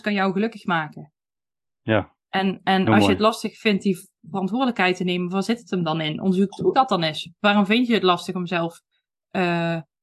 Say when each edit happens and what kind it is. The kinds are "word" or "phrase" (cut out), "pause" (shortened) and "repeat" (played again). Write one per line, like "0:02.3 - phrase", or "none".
0:06.7 - word